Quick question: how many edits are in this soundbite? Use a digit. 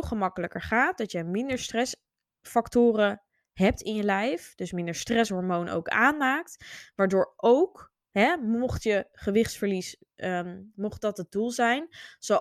0